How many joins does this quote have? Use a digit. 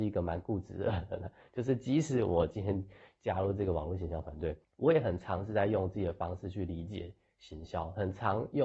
1